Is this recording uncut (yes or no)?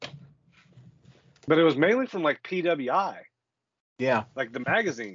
yes